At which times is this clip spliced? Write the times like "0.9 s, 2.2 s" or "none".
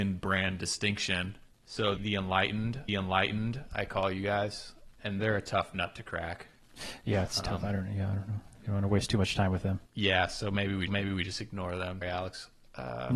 2.0 s, 2.9 s, 5.2 s, 9.9 s, 10.9 s, 12.0 s